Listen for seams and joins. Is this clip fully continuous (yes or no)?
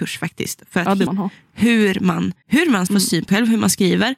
no